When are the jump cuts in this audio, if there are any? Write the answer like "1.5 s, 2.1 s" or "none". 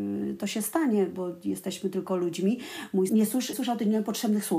3.1 s, 3.5 s

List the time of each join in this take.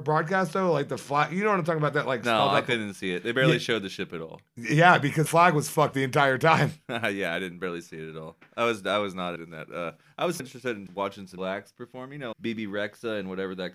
1.9 s, 5.3 s, 5.9 s, 9.4 s, 10.4 s, 10.9 s, 11.4 s, 12.3 s

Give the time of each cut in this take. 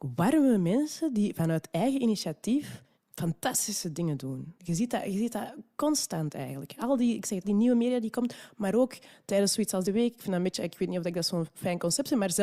2.9 s, 4.6 s, 7.4 s, 9.8 s

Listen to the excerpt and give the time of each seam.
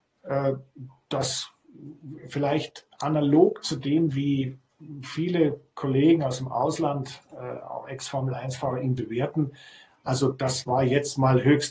none

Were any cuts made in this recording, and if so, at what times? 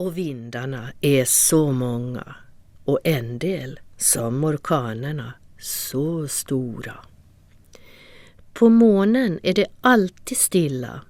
none

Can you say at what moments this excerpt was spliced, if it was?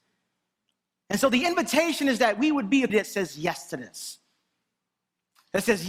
2.9 s

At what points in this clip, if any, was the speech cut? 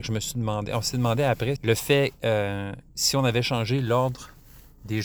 1.6 s, 2.9 s

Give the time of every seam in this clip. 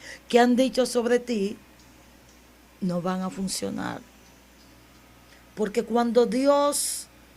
none

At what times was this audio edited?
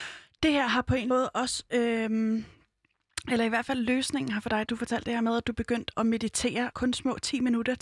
1.1 s, 4.7 s, 5.9 s, 6.7 s

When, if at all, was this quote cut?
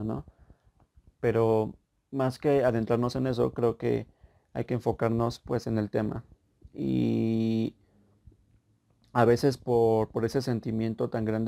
none

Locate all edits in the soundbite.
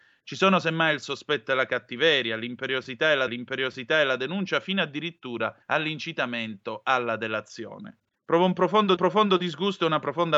3.3 s, 5.6 s, 8.1 s, 9.0 s

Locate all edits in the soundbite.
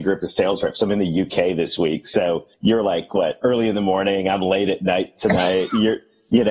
2.5 s

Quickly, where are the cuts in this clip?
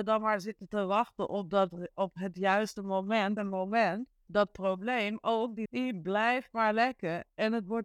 3.4 s, 4.3 s, 5.7 s

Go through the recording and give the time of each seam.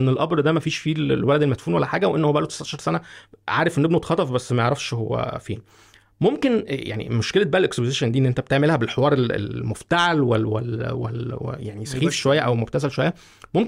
none

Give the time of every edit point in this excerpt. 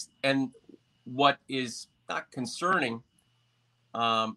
none

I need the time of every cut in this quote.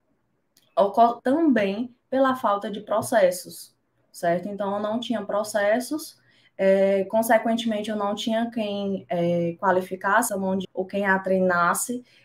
1.2 s, 10.3 s, 10.6 s

